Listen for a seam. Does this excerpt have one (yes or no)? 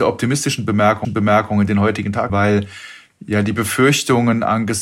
yes